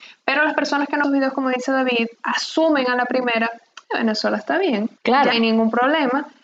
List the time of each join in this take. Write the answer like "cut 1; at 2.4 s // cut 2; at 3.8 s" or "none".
cut 1; at 1.0 s // cut 2; at 3.8 s // cut 3; at 5.0 s // cut 4; at 5.3 s